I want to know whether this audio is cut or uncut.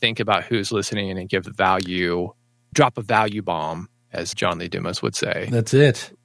cut